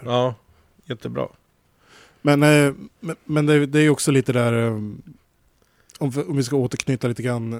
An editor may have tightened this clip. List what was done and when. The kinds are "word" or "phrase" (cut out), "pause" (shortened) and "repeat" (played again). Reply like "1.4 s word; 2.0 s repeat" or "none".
none